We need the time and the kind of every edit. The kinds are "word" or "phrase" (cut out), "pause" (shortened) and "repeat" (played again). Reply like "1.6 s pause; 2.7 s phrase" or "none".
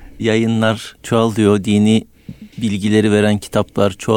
1.0 s pause; 2.5 s pause